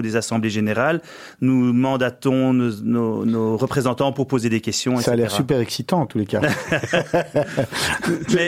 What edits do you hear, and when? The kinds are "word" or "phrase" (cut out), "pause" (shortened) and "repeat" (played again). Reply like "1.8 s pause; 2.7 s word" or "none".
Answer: none